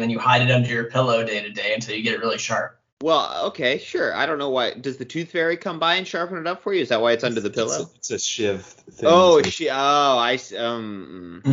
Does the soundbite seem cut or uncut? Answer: cut